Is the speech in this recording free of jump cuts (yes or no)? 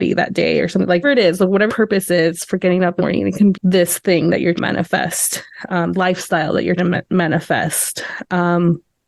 no